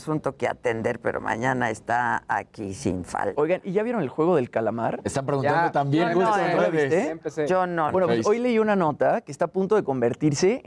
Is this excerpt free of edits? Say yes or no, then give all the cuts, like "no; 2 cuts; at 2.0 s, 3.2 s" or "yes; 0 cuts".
no; 1 cut; at 7.9 s